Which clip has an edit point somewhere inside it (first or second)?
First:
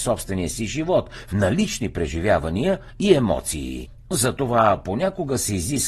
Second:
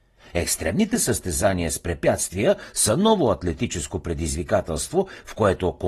first